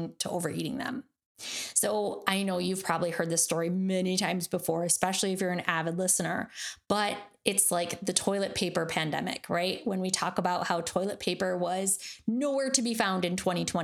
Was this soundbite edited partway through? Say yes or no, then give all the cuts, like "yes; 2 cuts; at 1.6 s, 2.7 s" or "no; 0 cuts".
no; 0 cuts